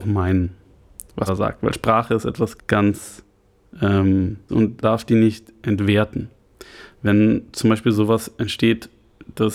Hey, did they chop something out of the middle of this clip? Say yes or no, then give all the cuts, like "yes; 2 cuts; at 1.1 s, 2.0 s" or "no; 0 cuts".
yes; 4 cuts; at 1.3 s, 2.6 s, 4.5 s, 4.8 s